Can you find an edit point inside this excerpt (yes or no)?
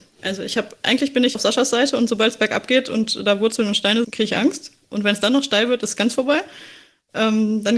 yes